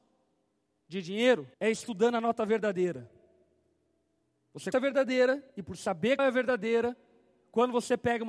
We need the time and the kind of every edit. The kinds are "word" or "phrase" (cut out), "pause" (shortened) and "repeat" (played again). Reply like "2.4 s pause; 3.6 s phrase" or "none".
1.5 s pause; 4.7 s word; 5.5 s pause; 6.2 s word